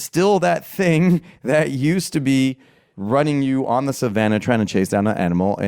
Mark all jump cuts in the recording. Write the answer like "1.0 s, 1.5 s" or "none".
none

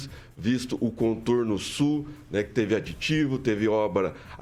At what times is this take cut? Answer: none

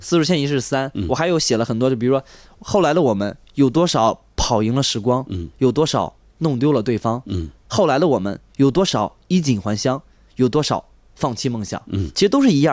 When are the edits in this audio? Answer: none

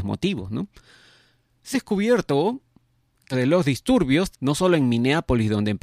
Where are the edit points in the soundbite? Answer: 1.7 s, 3.3 s, 4.3 s

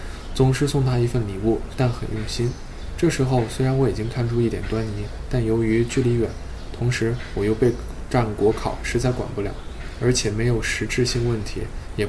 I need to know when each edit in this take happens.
1.7 s

